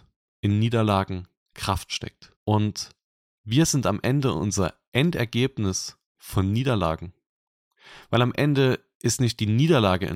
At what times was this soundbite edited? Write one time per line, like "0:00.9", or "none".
0:02.4
0:06.1